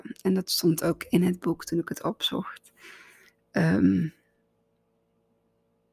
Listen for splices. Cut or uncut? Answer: uncut